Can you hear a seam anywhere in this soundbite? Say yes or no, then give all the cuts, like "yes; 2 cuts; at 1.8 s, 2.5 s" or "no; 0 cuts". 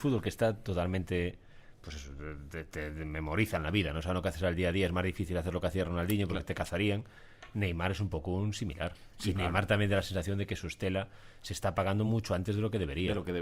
no; 0 cuts